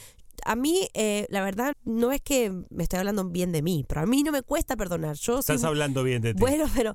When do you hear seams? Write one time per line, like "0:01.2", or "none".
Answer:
0:01.7